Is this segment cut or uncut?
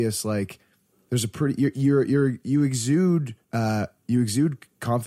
cut